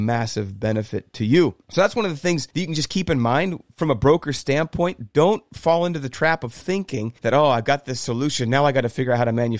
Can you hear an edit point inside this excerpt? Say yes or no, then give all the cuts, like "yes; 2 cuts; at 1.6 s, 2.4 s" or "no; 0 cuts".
yes; 4 cuts; at 1.6 s, 2.5 s, 3.7 s, 7.2 s